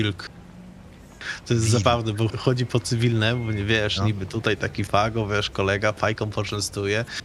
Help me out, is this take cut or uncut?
cut